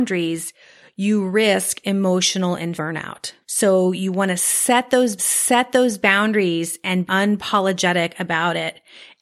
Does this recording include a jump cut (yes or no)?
yes